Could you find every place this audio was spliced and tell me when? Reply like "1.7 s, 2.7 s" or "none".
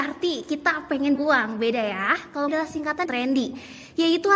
1.1 s, 2.5 s, 3.0 s